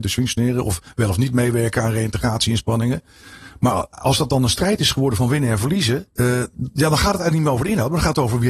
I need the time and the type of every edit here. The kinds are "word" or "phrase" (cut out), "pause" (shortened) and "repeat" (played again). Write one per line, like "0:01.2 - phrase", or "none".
0:06.1 - pause